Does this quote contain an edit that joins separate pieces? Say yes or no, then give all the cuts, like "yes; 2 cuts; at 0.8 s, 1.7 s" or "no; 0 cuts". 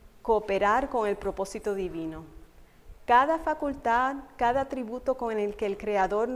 no; 0 cuts